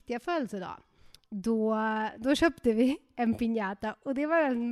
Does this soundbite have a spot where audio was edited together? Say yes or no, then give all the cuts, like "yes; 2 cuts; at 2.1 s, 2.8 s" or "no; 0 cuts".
no; 0 cuts